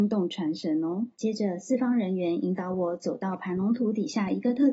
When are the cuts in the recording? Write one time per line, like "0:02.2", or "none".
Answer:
0:01.1